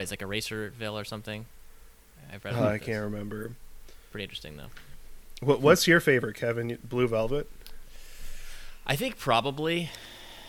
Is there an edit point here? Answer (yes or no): no